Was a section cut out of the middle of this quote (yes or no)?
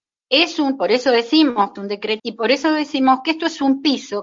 yes